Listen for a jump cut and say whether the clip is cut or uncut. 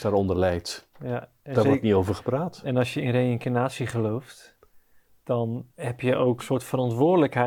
cut